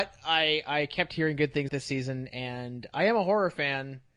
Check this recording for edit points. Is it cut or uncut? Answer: cut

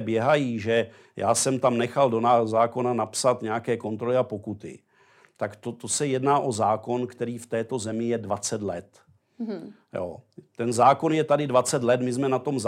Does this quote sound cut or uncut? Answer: uncut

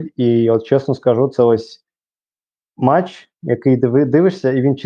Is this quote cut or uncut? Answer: uncut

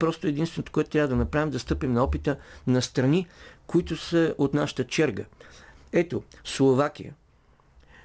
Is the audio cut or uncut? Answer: uncut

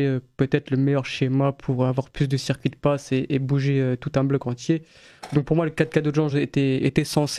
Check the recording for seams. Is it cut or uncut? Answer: uncut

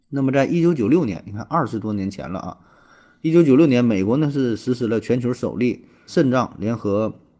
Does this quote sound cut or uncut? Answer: cut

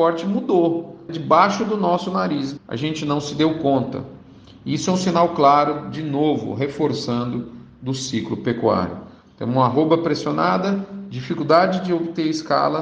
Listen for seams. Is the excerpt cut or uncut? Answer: cut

